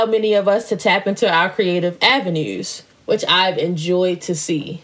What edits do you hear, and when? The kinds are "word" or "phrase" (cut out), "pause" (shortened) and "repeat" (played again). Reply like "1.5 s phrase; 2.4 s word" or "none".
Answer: 2.9 s pause